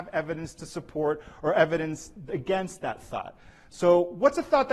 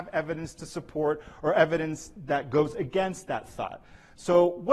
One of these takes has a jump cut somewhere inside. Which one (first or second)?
first